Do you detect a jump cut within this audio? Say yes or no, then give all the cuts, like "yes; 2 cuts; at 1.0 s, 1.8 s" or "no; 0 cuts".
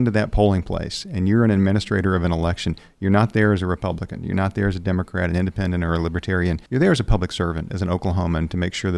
yes; 1 cut; at 6.7 s